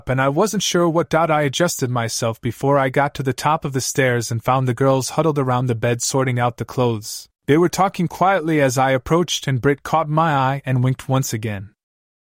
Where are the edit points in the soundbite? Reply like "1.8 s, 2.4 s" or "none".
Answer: 7.4 s